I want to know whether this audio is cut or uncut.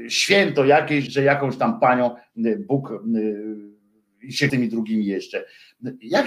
cut